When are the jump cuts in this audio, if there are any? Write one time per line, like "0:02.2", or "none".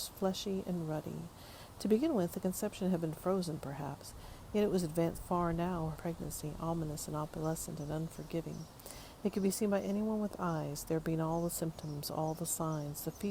0:05.2
0:05.9